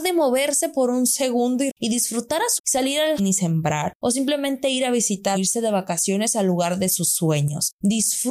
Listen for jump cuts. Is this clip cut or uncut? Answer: cut